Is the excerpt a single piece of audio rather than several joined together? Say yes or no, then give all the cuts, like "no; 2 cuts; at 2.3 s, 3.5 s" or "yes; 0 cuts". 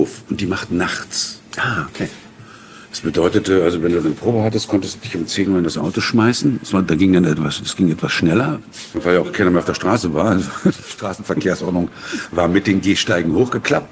yes; 0 cuts